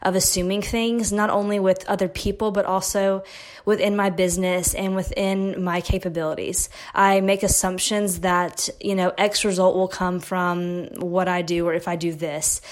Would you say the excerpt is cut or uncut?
uncut